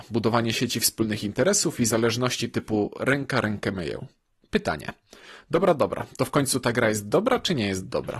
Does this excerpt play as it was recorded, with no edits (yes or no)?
yes